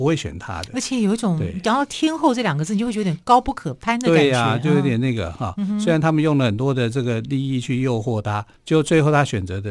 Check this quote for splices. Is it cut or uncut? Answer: cut